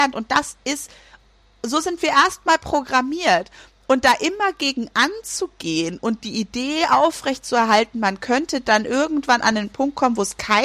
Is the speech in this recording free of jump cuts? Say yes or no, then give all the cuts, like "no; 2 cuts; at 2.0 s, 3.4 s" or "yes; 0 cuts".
yes; 0 cuts